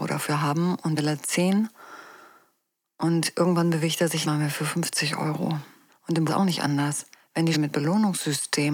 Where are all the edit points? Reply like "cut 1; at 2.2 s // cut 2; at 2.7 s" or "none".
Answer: cut 1; at 1.0 s // cut 2; at 4.2 s // cut 3; at 5.9 s // cut 4; at 6.3 s // cut 5; at 7.1 s // cut 6; at 7.5 s

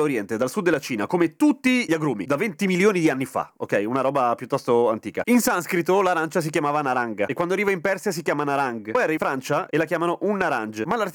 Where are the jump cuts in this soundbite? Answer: cut 1; at 9.2 s

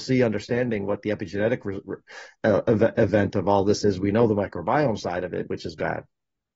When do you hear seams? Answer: none

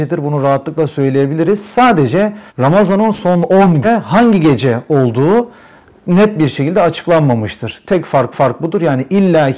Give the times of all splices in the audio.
cut 1; at 2.5 s // cut 2; at 3.8 s // cut 3; at 8.3 s

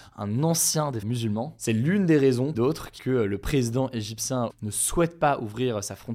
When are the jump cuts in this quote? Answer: cut 1; at 1.0 s // cut 2; at 2.5 s // cut 3; at 3.0 s // cut 4; at 4.5 s

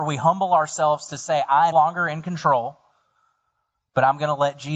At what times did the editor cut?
cut 1; at 1.7 s

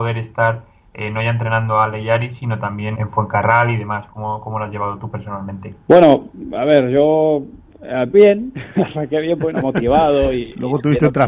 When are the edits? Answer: cut 1; at 2.9 s // cut 2; at 5.8 s // cut 3; at 8.1 s

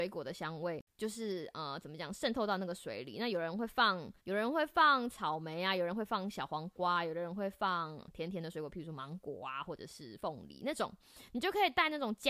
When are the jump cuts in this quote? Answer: cut 1; at 4.2 s

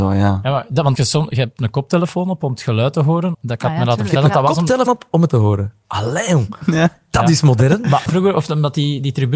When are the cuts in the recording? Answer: cut 1; at 1.0 s // cut 2; at 1.6 s // cut 3; at 3.3 s // cut 4; at 4.9 s // cut 5; at 5.3 s // cut 6; at 8.1 s

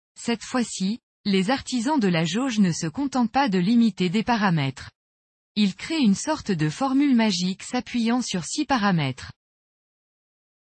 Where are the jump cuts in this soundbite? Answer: none

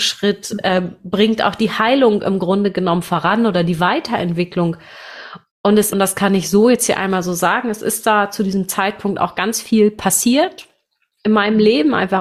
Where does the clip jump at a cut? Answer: cut 1; at 5.9 s

